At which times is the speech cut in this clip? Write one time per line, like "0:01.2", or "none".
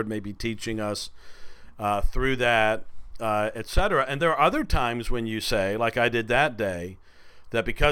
0:04.2